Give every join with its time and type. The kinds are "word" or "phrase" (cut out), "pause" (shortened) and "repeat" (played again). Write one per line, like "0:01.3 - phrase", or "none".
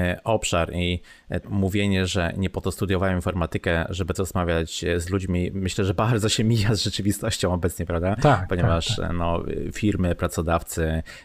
0:01.4 - word
0:04.1 - word